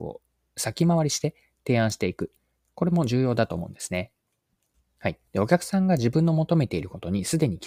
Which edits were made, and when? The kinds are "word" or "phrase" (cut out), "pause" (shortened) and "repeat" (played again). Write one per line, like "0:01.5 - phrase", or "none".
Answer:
0:04.7 - pause
0:05.3 - pause